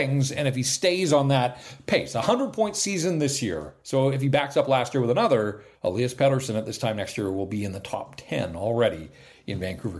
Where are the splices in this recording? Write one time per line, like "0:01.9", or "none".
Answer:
0:05.7